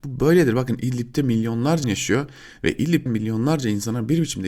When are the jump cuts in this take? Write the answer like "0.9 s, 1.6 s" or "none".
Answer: 1.8 s, 3.1 s